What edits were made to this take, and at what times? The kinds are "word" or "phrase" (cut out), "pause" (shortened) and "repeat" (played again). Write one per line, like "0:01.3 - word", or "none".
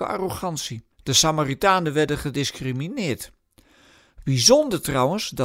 0:00.9 - pause